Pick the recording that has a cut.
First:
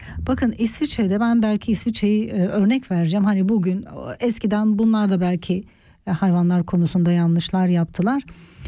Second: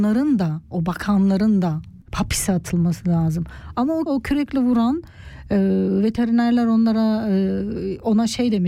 second; 2 cuts; at 2.0 s, 4.1 s

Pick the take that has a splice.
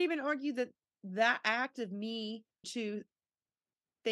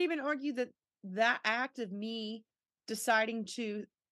first; 1 cut; at 2.6 s

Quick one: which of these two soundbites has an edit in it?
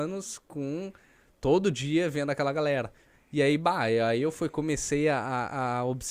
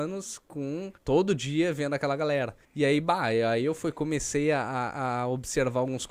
second; 2 cuts; at 1.0 s, 2.6 s

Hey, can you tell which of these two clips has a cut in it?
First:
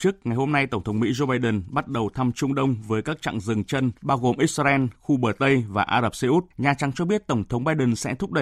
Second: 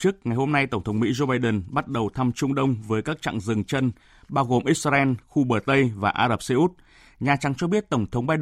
first; 2 cuts; at 4.0 s, 6.5 s

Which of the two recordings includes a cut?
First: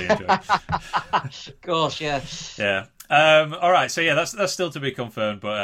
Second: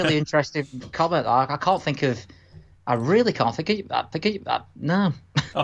second; 2 cuts; at 2.8 s, 4.1 s

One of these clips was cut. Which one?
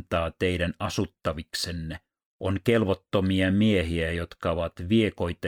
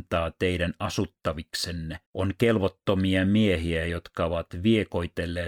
second; 1 cut; at 2.1 s

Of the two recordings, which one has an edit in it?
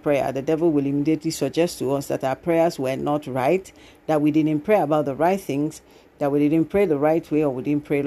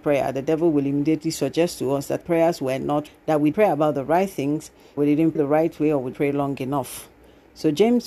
second; 6 cuts; at 2.2 s, 3.1 s, 3.5 s, 5.0 s, 5.3 s, 6.1 s

